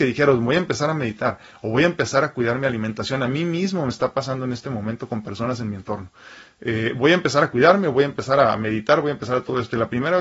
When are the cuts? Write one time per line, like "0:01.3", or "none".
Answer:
none